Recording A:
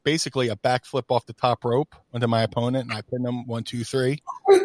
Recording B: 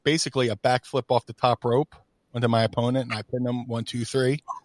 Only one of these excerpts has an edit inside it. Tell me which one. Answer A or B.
A